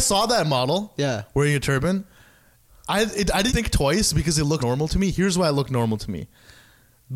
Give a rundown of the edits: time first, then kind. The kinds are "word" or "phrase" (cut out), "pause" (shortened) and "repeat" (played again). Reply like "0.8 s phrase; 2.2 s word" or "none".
3.5 s word; 4.6 s word